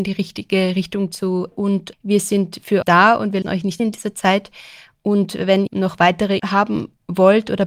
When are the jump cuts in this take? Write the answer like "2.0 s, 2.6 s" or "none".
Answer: 1.5 s, 1.9 s, 2.8 s, 3.4 s, 3.8 s, 5.7 s, 6.4 s